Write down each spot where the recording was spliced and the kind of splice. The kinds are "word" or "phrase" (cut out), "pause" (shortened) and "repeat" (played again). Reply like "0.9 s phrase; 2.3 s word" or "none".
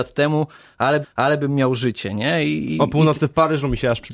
1.0 s repeat